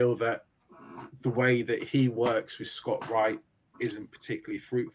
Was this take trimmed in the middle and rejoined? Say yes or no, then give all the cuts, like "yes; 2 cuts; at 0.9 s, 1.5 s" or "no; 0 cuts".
no; 0 cuts